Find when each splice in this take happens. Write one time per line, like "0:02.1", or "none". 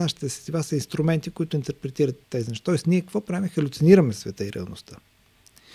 0:02.2